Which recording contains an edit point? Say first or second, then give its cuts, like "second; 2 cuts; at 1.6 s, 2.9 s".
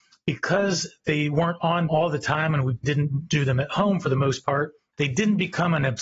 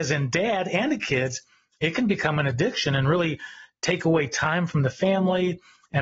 first; 3 cuts; at 1.9 s, 2.8 s, 4.9 s